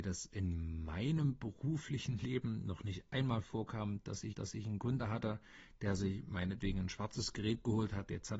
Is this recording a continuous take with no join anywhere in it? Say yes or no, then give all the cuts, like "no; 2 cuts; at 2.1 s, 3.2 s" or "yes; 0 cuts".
no; 1 cut; at 4.3 s